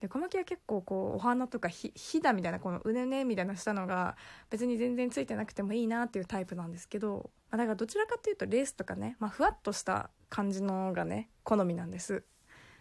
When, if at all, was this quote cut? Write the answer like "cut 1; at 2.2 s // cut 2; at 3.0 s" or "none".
cut 1; at 7.4 s